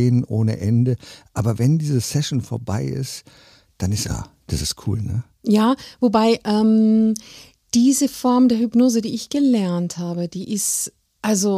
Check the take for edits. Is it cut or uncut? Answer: cut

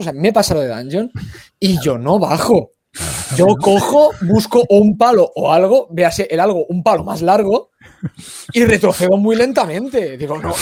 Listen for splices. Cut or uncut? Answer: uncut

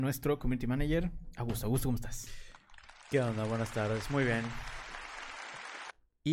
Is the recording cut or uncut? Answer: uncut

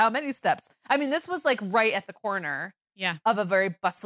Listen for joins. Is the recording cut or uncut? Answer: uncut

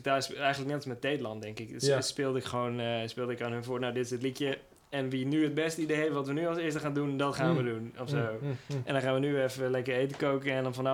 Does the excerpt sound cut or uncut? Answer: uncut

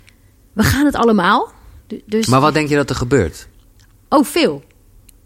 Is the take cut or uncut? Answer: uncut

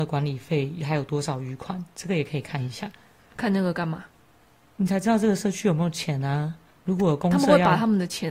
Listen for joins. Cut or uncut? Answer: uncut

